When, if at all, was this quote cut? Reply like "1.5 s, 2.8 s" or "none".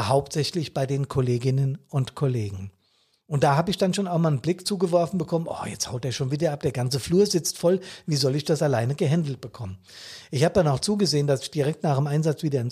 none